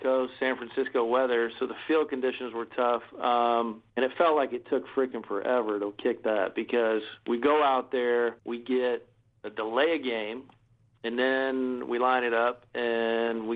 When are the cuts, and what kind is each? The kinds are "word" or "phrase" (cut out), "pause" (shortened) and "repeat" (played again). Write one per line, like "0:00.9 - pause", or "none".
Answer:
0:03.9 - pause
0:08.4 - pause
0:10.9 - pause